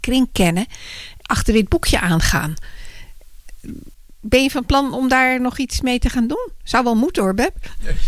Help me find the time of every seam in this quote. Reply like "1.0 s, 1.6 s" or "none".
1.2 s